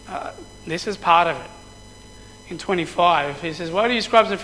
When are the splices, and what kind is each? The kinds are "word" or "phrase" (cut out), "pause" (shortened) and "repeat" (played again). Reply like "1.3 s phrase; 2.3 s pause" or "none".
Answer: none